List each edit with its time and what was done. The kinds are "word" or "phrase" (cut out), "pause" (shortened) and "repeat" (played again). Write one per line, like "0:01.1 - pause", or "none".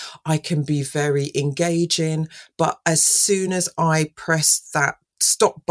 none